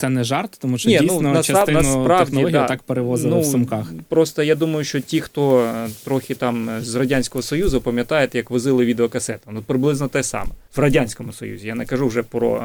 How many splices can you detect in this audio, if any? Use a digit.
1